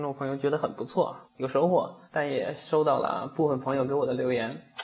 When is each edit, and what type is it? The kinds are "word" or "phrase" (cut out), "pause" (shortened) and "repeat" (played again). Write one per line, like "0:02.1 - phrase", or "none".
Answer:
0:01.3 - pause
0:02.1 - pause